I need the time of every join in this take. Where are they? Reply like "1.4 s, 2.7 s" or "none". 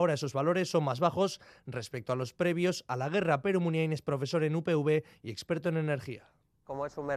none